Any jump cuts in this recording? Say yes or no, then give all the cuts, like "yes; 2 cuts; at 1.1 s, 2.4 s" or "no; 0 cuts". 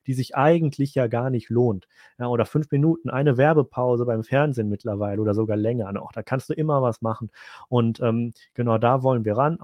no; 0 cuts